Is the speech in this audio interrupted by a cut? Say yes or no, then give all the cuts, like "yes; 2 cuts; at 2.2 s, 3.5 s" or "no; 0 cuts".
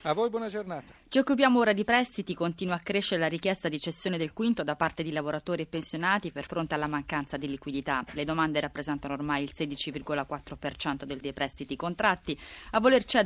yes; 2 cuts; at 6.5 s, 11.2 s